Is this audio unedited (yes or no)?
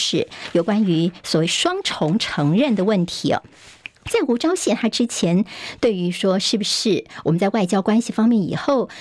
no